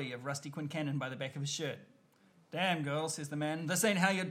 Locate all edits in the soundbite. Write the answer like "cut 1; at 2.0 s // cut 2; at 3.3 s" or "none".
none